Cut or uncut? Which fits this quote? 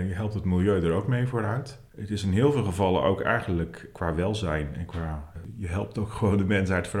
cut